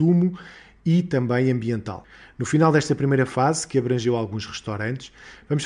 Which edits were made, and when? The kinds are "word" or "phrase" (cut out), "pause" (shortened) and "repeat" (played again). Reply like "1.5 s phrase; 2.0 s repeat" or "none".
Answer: none